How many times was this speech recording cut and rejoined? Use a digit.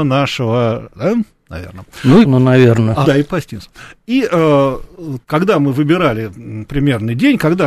4